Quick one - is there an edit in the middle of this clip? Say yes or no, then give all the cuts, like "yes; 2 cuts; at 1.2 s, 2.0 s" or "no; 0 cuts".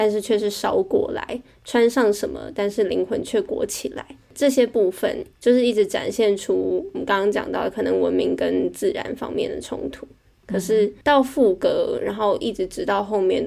no; 0 cuts